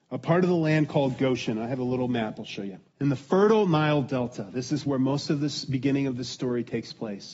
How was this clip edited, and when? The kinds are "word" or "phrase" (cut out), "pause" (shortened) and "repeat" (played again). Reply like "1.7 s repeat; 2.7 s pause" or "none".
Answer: 2.9 s pause